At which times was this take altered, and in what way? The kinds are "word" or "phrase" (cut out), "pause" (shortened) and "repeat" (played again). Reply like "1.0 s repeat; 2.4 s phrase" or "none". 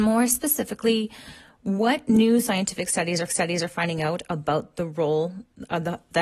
3.3 s repeat